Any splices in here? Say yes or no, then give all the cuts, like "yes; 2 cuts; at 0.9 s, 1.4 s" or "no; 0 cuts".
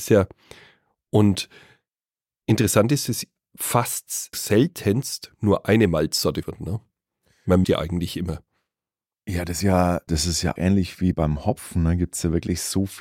yes; 8 cuts; at 3.1 s, 4.3 s, 6.4 s, 7.6 s, 9.6 s, 10.1 s, 10.6 s, 11.1 s